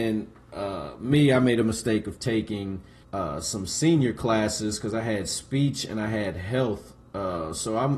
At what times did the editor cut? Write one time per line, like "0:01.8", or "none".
0:03.0